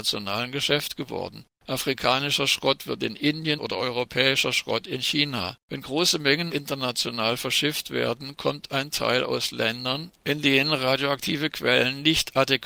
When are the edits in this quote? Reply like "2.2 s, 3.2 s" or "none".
1.5 s, 3.6 s, 5.6 s, 6.5 s